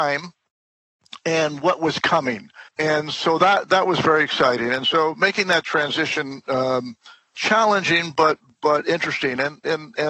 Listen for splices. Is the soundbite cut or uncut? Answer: cut